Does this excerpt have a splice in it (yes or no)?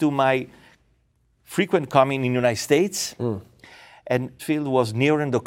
yes